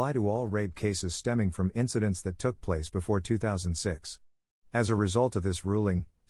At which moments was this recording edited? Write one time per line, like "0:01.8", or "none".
none